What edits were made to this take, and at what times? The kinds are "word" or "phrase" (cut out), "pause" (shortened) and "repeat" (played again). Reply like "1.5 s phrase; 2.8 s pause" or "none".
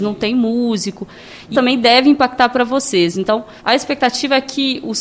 1.5 s word; 3.6 s pause